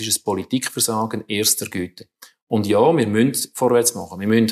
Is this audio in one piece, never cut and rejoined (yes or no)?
yes